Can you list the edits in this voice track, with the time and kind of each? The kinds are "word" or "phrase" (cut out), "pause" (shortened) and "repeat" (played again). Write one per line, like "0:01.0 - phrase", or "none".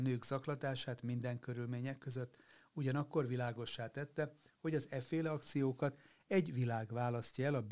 none

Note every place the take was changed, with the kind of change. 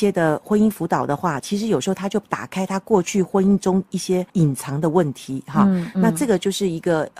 0:04.3 - pause

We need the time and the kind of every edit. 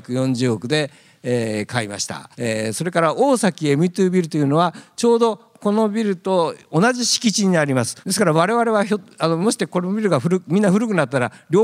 0:02.3 - pause
0:08.0 - pause

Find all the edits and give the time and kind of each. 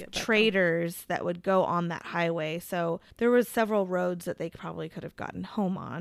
none

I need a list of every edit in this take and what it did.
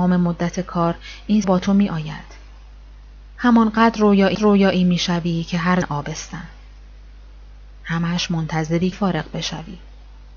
0:01.4 - word
0:04.3 - repeat
0:05.8 - word
0:08.9 - word

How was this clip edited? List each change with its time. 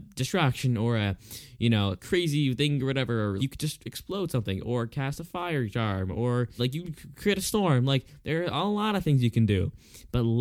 0:02.0 - word
0:03.4 - word
0:06.6 - word

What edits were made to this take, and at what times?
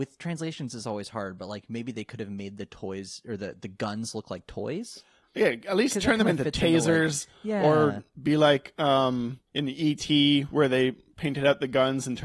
0:09.5 - pause

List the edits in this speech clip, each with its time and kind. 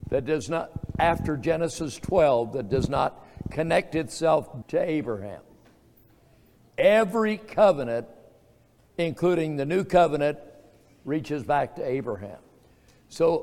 0:04.6 - word

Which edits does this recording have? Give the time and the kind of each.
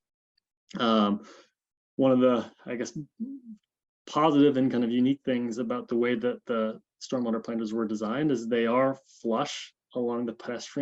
none

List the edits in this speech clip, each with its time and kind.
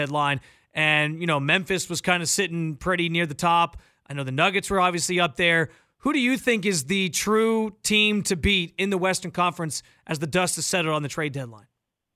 none

